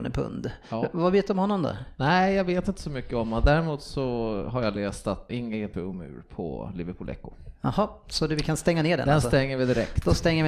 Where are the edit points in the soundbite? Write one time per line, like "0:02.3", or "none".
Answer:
0:05.3
0:05.7